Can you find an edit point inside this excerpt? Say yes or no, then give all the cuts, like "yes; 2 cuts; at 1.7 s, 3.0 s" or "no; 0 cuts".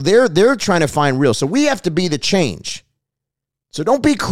no; 0 cuts